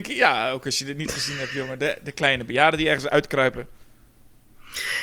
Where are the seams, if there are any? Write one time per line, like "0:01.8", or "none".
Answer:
none